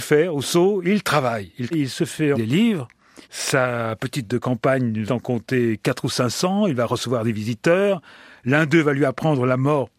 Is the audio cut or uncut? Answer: cut